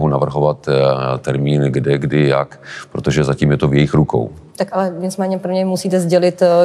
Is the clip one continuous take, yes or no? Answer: no